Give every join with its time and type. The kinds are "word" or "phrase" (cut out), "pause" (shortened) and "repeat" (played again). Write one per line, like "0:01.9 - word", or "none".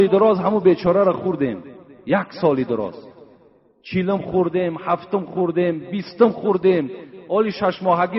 none